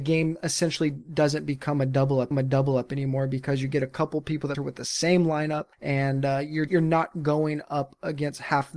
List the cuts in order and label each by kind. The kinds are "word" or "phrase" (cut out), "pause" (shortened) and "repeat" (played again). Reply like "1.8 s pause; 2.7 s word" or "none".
2.3 s repeat; 4.5 s phrase; 5.7 s pause; 6.7 s word